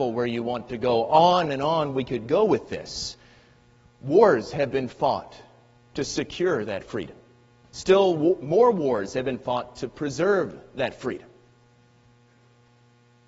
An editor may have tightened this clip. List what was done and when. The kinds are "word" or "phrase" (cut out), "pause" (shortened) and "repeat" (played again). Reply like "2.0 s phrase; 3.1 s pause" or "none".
1.5 s phrase